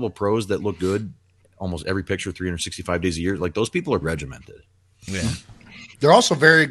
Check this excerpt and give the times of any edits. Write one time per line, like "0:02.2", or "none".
0:04.0